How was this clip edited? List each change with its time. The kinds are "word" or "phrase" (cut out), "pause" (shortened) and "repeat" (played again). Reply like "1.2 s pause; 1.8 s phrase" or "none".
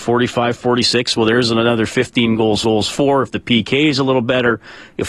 2.6 s repeat